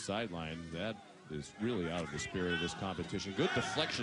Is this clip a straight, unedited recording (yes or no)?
yes